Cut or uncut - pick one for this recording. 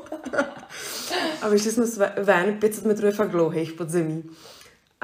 uncut